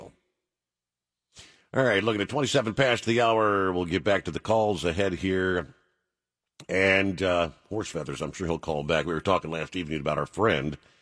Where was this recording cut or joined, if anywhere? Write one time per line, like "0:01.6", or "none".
none

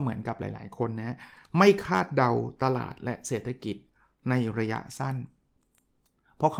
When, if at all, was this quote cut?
none

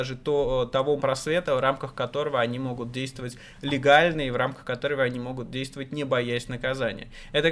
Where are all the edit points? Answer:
0:01.0

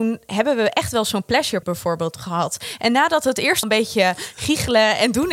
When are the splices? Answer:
0:01.6
0:03.6

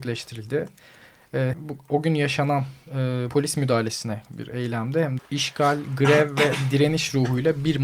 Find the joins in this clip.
0:01.5
0:03.3
0:04.3
0:05.2

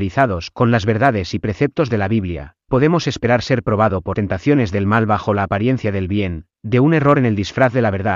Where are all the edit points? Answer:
0:02.7
0:04.1

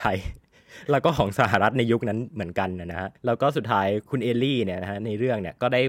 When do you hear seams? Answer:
0:03.2

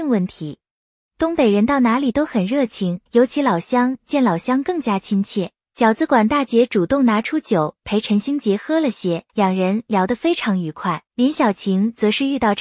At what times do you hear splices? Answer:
0:03.1
0:09.3
0:11.1

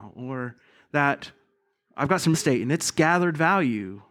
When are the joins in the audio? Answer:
0:02.3

